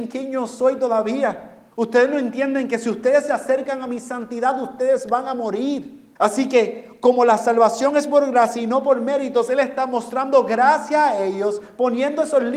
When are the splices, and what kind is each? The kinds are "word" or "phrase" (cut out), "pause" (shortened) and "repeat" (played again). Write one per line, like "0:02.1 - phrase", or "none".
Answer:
0:01.7 - pause
0:06.2 - pause